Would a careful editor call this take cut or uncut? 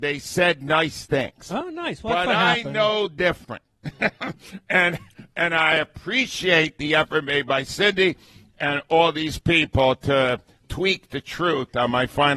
uncut